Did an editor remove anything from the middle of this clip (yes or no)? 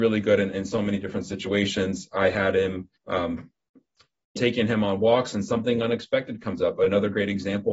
yes